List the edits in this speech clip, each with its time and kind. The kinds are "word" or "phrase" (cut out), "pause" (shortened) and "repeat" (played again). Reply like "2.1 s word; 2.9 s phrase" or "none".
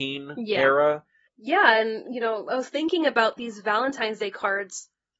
none